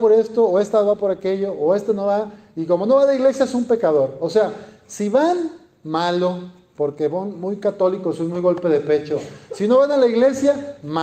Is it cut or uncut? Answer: uncut